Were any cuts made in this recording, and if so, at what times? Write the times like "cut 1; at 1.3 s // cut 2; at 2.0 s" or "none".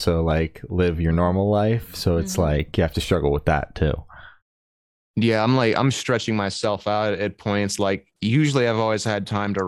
cut 1; at 8.1 s